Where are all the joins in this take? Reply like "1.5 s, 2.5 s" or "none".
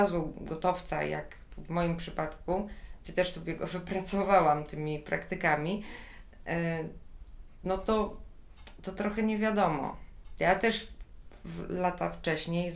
none